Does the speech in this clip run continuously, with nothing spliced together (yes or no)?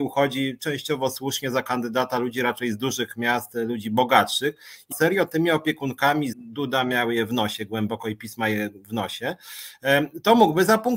no